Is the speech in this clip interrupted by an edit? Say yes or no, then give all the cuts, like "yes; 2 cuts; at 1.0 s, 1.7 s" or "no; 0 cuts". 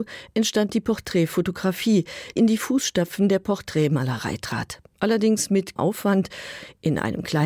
yes; 2 cuts; at 2.4 s, 5.8 s